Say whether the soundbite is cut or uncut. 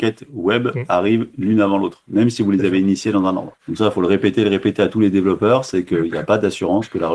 cut